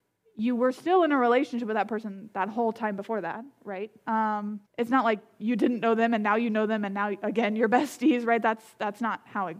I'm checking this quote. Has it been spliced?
yes; 1 cut; at 4.7 s

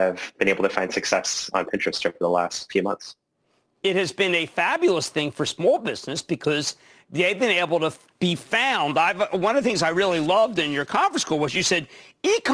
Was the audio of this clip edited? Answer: no; 0 cuts

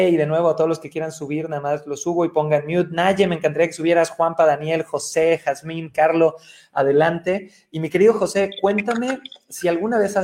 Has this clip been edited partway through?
no; 0 cuts

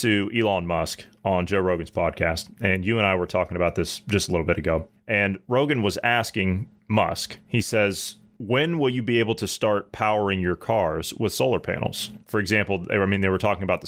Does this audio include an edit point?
no; 0 cuts

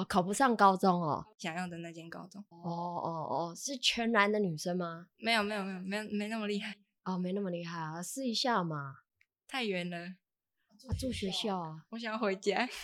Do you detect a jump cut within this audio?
yes; 1 cut; at 2.5 s

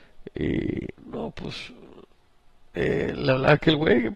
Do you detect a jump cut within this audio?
no; 0 cuts

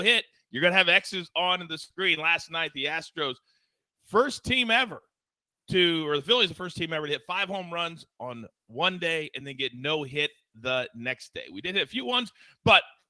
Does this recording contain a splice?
no; 0 cuts

